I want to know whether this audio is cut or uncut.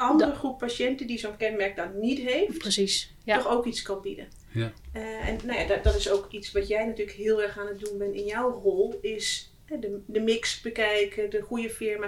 uncut